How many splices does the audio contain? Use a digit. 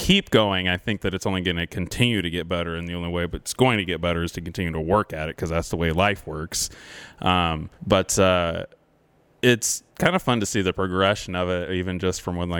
2